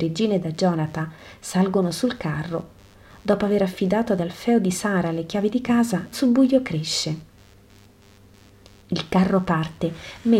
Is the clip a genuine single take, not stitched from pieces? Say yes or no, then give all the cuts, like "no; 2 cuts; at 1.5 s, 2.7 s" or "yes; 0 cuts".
no; 1 cut; at 6.1 s